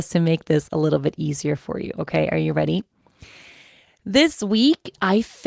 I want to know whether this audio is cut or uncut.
uncut